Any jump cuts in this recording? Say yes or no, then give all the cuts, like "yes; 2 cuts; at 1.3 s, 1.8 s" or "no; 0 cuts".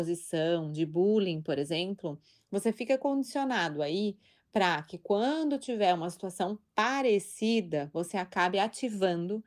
no; 0 cuts